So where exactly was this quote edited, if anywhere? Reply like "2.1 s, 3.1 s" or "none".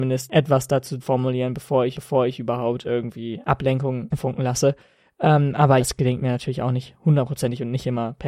1.0 s, 2.0 s, 4.1 s, 5.8 s